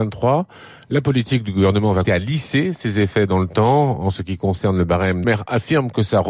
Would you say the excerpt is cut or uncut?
cut